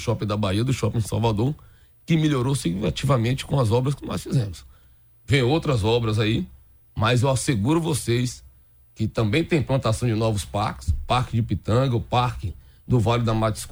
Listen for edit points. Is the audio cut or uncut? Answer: uncut